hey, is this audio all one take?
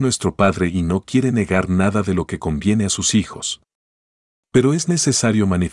yes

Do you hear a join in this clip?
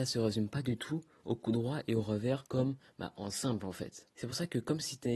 yes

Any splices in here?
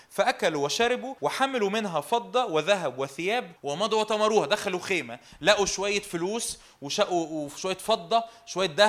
yes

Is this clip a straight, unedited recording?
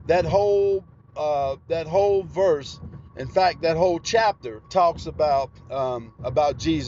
no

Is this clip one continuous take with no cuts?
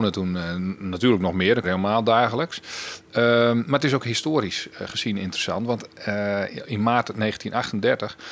no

